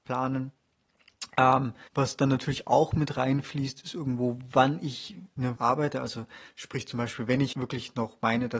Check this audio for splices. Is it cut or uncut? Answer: cut